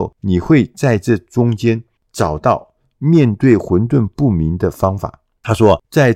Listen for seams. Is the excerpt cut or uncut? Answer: uncut